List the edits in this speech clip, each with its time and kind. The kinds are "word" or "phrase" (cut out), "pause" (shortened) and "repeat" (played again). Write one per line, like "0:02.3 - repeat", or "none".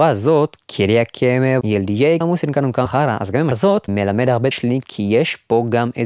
0:01.6 - word
0:02.2 - word
0:02.9 - word
0:03.5 - word
0:03.9 - word
0:04.5 - word